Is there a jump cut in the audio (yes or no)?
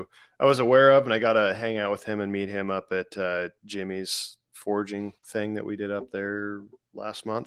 yes